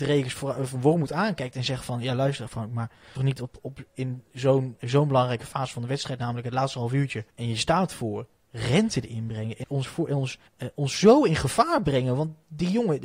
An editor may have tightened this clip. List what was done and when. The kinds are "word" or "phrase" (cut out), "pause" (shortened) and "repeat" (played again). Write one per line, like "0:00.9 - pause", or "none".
0:03.2 - phrase
0:04.8 - word
0:07.3 - pause
0:09.6 - word
0:10.5 - pause